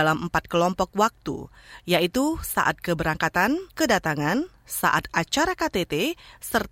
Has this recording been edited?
yes; 1 cut; at 3.7 s

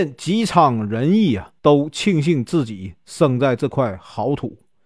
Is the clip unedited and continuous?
no; 1 cut; at 1.6 s

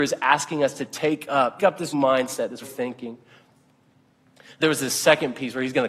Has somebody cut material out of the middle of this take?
yes; 4 cuts; at 1.6 s, 1.9 s, 2.6 s, 4.6 s

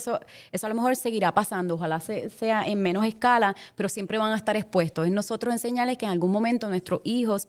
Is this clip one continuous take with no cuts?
yes; 0 cuts

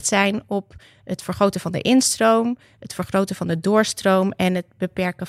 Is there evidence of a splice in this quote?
no; 0 cuts

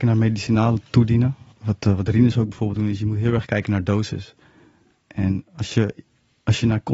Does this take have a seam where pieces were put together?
yes; 2 cuts; at 1.5 s, 2.8 s

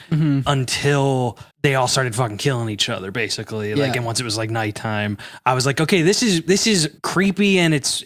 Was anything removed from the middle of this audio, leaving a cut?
yes; 2 cuts; at 1.5 s, 7.0 s

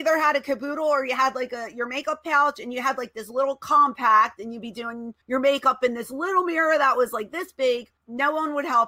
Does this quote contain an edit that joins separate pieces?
yes; 2 cuts; at 5.2 s, 8.0 s

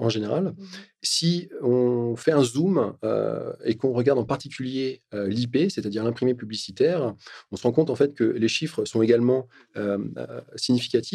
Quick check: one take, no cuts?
yes; 0 cuts

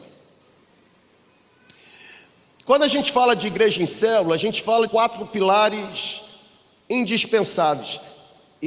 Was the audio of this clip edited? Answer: yes; 1 cut; at 4.9 s

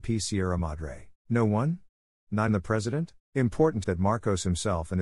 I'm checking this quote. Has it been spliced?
yes; 4 cuts; at 1.2 s, 2.5 s, 3.2 s, 3.8 s

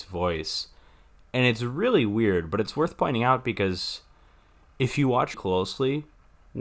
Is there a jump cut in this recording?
yes; 1 cut; at 5.3 s

